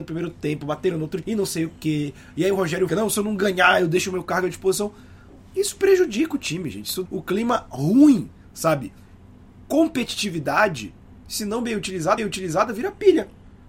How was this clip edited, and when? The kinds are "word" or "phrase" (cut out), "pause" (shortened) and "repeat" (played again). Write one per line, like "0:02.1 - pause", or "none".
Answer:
0:01.2 - word
0:02.9 - word
0:07.1 - word
0:12.2 - repeat